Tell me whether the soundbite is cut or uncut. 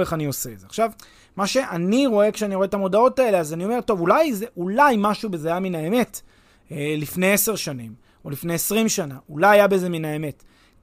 uncut